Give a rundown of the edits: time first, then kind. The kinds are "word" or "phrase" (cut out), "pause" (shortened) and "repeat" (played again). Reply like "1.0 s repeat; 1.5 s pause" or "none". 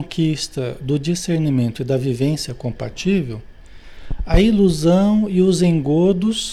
none